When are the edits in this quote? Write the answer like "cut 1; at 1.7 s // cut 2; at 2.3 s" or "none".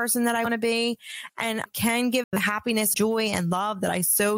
cut 1; at 1.7 s // cut 2; at 2.2 s // cut 3; at 2.9 s